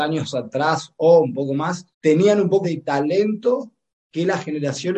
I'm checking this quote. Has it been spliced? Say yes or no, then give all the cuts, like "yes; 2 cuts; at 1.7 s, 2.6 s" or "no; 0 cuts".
yes; 2 cuts; at 1.9 s, 2.6 s